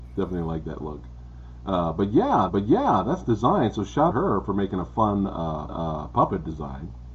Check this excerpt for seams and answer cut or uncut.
cut